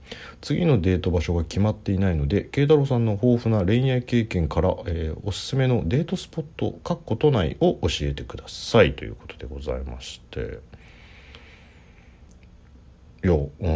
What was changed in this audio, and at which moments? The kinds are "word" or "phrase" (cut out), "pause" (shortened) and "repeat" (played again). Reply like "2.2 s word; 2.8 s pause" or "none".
none